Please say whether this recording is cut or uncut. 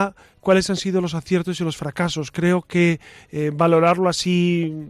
uncut